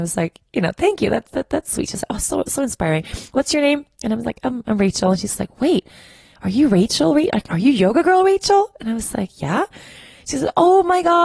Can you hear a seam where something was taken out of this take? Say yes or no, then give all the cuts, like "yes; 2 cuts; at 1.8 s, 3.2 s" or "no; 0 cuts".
no; 0 cuts